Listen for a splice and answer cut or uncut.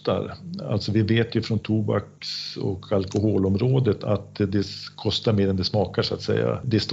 uncut